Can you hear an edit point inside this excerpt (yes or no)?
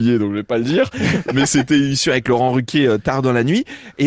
no